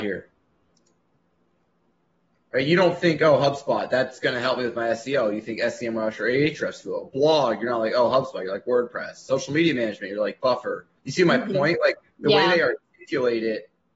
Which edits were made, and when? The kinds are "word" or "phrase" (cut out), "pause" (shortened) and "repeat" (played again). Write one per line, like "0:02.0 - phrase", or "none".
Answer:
0:11.0 - pause